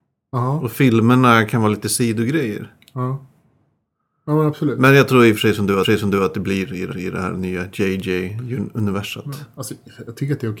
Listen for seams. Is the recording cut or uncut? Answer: cut